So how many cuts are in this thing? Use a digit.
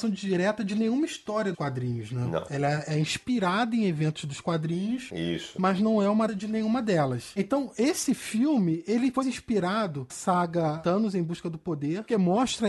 4